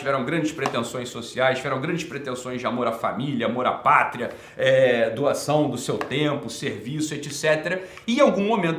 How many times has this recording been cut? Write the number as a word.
zero